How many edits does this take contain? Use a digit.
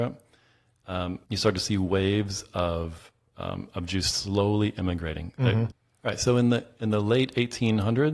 1